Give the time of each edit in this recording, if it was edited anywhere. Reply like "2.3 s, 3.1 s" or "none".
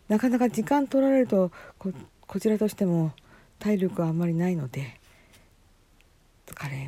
none